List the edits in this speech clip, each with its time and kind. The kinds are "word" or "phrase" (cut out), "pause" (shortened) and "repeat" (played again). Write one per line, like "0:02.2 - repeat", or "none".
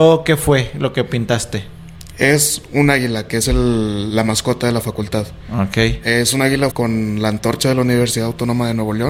0:06.7 - word